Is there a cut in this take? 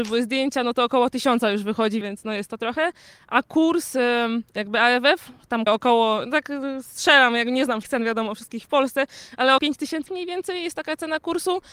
yes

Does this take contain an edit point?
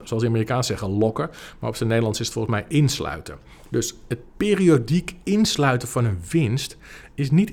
no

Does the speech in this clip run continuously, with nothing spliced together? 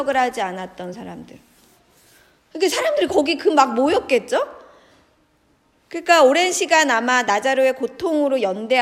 yes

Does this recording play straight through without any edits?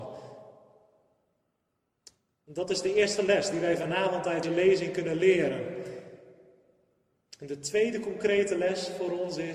no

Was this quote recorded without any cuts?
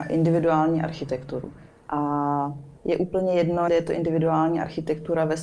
no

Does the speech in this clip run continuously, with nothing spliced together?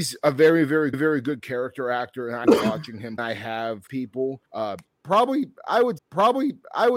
no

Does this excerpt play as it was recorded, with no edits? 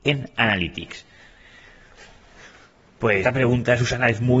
no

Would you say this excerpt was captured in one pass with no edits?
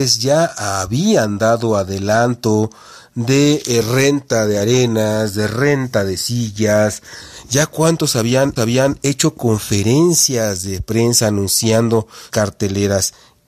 no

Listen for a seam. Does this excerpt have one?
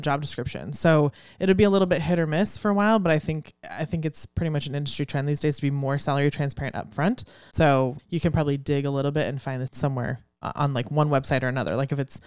yes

